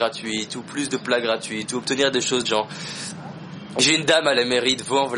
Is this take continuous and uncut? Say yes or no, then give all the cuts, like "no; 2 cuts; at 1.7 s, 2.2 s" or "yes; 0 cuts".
no; 1 cut; at 2.4 s